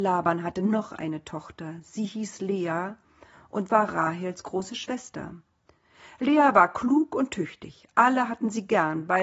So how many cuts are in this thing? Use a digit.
0